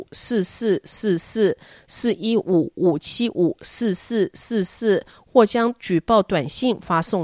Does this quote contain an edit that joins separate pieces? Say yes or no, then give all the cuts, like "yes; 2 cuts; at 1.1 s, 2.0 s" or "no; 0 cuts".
no; 0 cuts